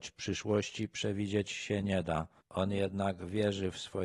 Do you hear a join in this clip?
no; 0 cuts

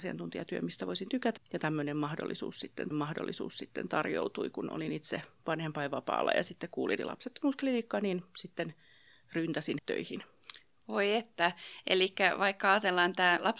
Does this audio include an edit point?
yes; 5 cuts; at 1.4 s, 2.9 s, 5.3 s, 7.0 s, 9.8 s

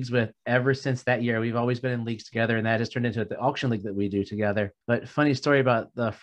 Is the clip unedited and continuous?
no; 1 cut; at 4.8 s

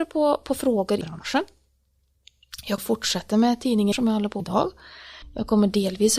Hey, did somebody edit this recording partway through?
yes; 4 cuts; at 1.0 s, 2.8 s, 3.9 s, 4.4 s

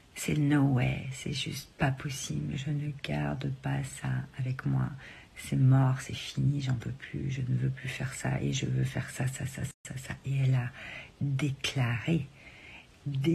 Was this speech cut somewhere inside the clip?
no; 0 cuts

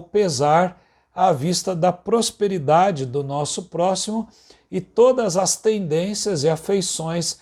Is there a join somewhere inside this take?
no; 0 cuts

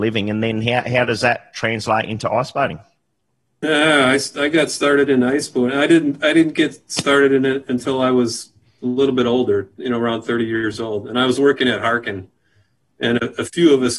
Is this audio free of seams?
yes; 0 cuts

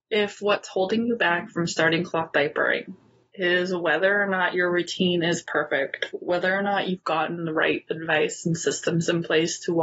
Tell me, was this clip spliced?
no; 0 cuts

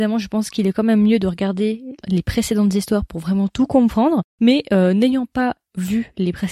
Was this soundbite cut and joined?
no; 0 cuts

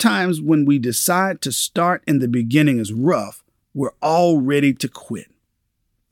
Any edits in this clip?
no; 0 cuts

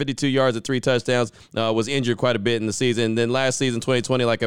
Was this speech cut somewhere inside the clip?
no; 0 cuts

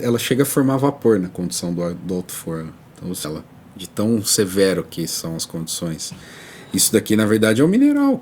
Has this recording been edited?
yes; 1 cut; at 3.2 s

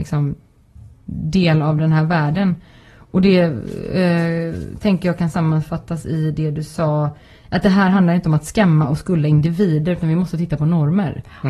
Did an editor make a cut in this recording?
no; 0 cuts

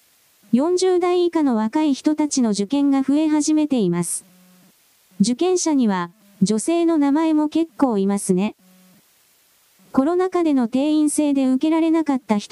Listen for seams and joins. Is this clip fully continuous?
yes; 0 cuts

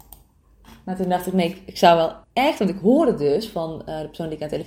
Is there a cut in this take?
yes; 1 cut; at 2.2 s

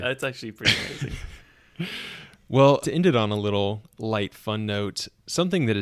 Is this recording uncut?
no; 1 cut; at 2.8 s

